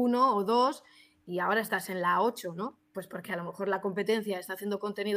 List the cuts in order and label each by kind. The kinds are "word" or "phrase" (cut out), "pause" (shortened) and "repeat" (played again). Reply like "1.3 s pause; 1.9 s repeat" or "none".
none

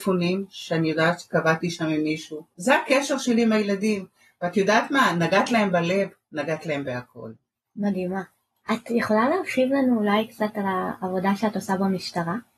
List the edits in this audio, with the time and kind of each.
none

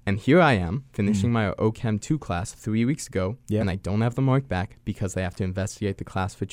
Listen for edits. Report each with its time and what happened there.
none

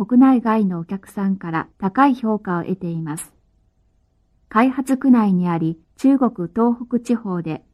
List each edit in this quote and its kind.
1.7 s pause; 4.0 s pause; 5.8 s pause

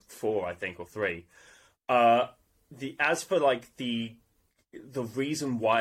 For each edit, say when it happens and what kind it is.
none

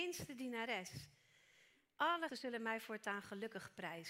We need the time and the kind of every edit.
2.3 s word

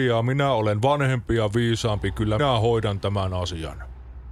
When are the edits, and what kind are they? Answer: 2.4 s word

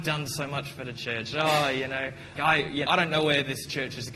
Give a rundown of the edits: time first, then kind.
2.4 s word; 2.9 s word

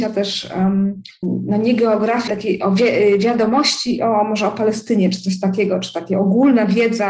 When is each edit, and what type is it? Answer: 2.3 s word

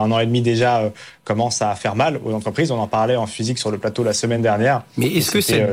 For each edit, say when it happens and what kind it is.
none

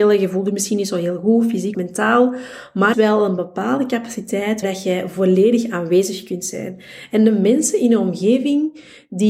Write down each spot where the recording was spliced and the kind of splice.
1.7 s word; 2.9 s phrase; 4.6 s word

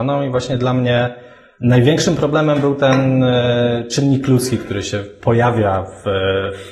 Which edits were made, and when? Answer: none

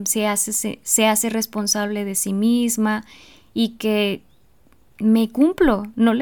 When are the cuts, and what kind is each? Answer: none

